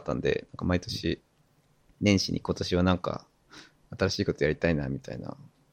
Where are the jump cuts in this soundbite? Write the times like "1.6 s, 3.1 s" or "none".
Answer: none